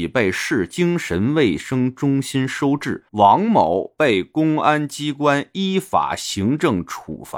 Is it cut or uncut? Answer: cut